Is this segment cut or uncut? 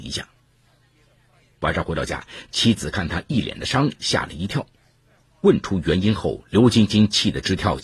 uncut